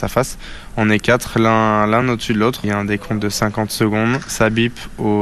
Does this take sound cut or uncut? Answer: uncut